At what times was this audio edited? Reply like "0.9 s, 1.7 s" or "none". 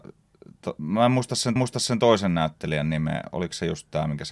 1.6 s